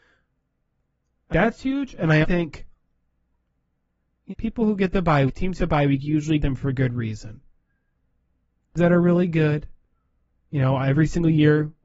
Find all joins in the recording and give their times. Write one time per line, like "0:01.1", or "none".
0:01.3
0:02.2
0:04.3
0:05.3
0:05.6
0:06.4
0:08.8